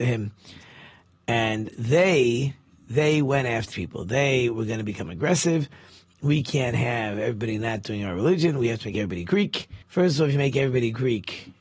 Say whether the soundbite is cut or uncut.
cut